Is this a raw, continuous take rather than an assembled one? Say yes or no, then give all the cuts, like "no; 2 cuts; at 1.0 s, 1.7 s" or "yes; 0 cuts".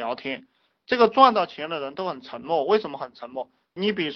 yes; 0 cuts